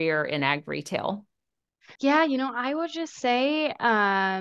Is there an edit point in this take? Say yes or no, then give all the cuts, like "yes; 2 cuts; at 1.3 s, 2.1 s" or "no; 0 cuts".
yes; 1 cut; at 2.0 s